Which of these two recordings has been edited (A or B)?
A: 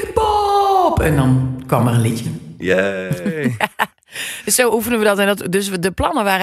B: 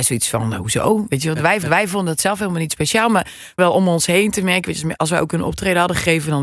B